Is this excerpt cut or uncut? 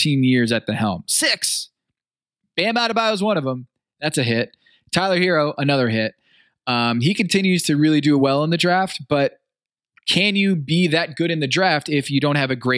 uncut